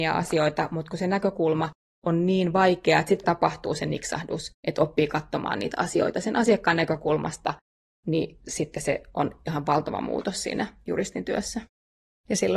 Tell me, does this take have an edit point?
yes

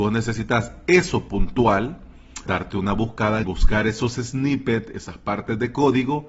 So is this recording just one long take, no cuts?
no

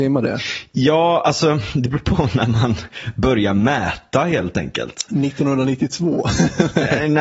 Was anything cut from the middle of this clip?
no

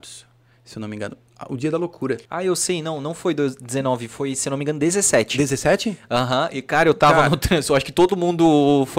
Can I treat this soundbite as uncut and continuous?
no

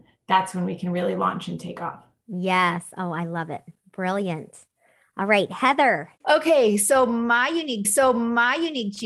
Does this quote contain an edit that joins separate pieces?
yes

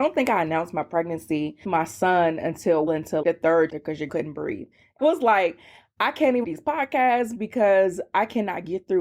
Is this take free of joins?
no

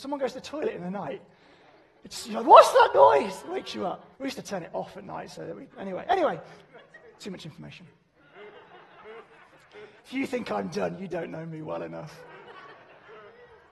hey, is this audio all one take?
no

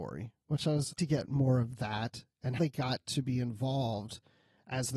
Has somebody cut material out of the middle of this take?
yes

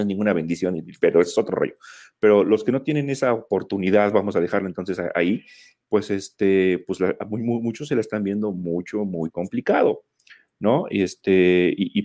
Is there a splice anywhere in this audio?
no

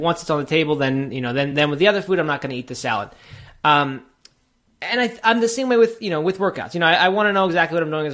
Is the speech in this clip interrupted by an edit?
no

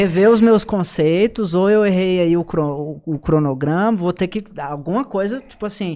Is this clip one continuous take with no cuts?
yes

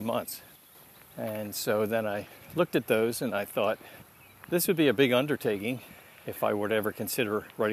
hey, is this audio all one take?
yes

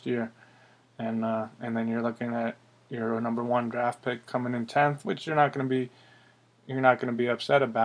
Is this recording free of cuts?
yes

